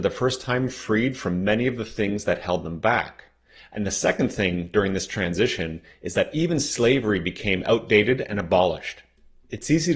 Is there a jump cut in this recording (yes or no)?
no